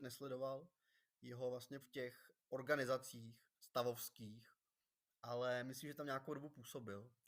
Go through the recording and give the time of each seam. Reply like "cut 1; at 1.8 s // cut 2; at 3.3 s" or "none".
cut 1; at 1.8 s // cut 2; at 2.4 s // cut 3; at 3.6 s